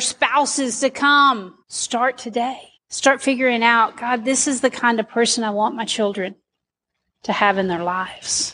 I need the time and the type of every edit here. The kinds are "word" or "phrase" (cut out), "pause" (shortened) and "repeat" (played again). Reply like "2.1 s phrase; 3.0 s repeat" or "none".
1.6 s pause; 2.8 s pause